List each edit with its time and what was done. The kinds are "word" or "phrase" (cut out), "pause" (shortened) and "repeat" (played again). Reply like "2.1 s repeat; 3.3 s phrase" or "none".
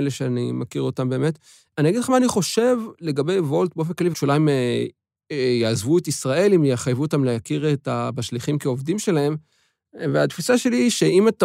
4.1 s phrase